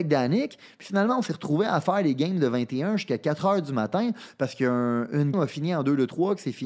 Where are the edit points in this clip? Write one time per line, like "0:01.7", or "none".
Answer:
0:05.3